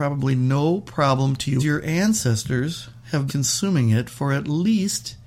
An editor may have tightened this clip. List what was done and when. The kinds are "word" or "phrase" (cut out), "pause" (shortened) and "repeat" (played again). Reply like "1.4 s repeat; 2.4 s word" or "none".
1.6 s phrase; 3.3 s word